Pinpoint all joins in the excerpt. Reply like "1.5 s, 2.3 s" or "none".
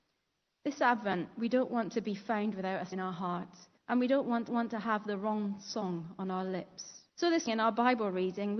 2.9 s, 3.8 s, 4.5 s, 7.1 s, 7.5 s